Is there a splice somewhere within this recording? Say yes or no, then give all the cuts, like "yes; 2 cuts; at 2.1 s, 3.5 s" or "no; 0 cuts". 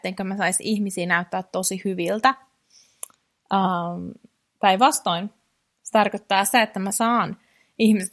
no; 0 cuts